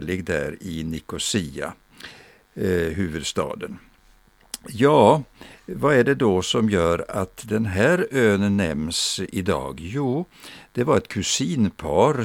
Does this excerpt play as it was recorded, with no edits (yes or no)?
yes